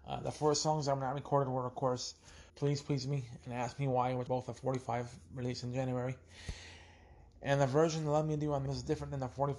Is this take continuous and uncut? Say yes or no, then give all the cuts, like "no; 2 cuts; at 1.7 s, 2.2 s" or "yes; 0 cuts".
no; 3 cuts; at 2.5 s, 4.3 s, 8.7 s